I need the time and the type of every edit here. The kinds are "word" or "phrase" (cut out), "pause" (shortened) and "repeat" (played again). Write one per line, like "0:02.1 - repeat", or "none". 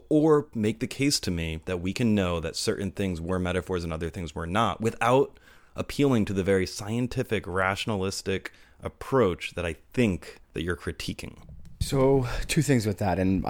0:10.4 - pause